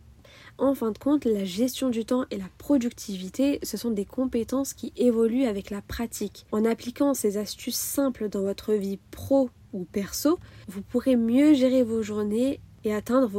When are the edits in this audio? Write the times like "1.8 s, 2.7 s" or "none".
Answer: 6.5 s